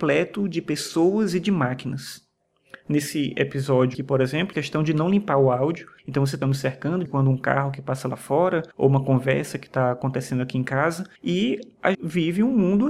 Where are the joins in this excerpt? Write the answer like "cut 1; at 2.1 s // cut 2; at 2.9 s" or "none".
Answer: cut 1; at 3.9 s // cut 2; at 4.5 s // cut 3; at 6.0 s // cut 4; at 6.4 s // cut 5; at 7.1 s // cut 6; at 8.7 s // cut 7; at 11.2 s // cut 8; at 11.9 s